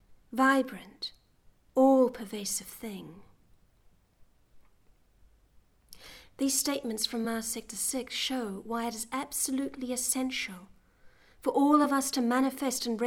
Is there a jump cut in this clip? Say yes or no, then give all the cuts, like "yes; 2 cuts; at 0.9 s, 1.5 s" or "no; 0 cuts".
no; 0 cuts